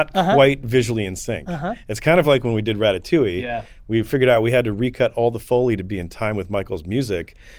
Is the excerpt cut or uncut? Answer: uncut